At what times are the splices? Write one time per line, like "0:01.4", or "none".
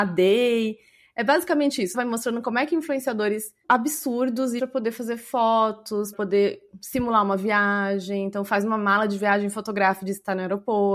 0:01.9
0:03.6
0:04.6
0:06.1